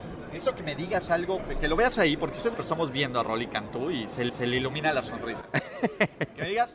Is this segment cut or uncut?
cut